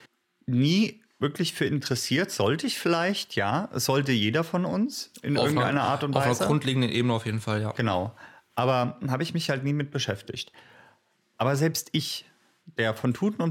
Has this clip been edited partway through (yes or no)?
no